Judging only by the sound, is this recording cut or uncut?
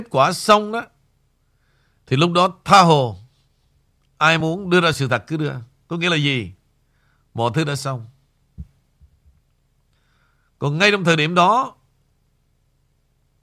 uncut